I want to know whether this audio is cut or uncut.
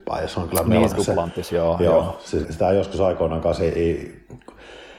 cut